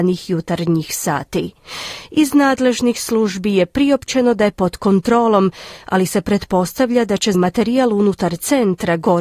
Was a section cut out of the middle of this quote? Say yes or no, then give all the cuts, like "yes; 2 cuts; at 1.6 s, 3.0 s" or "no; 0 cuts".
yes; 2 cuts; at 4.5 s, 7.3 s